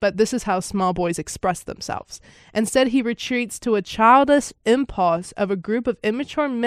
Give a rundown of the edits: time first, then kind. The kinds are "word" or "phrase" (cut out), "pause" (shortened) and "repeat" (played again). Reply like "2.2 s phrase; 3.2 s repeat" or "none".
none